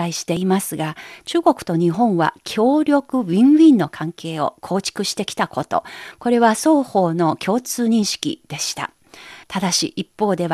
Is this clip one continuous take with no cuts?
no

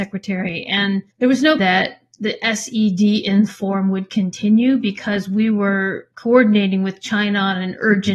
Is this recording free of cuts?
no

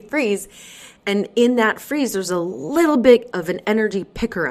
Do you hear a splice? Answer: yes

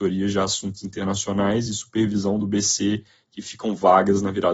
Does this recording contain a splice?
no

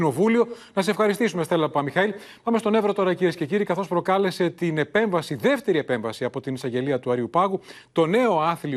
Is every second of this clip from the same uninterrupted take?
yes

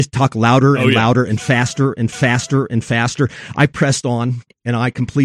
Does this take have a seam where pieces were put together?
yes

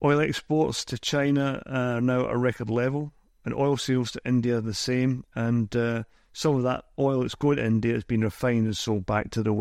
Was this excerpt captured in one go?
yes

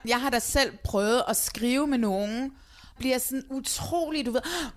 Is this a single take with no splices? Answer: no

